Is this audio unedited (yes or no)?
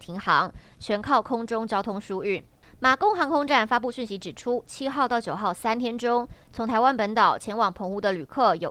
yes